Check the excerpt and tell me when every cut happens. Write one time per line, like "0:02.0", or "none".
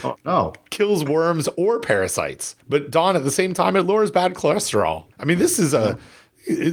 0:02.6
0:05.1